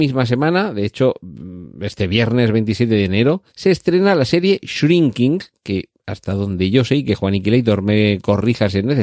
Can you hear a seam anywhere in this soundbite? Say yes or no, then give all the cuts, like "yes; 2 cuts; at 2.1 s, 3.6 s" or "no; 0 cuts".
yes; 1 cut; at 3.5 s